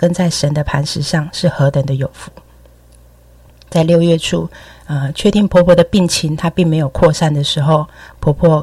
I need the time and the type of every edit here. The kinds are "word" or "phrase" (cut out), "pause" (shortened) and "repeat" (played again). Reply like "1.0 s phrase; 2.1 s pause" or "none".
none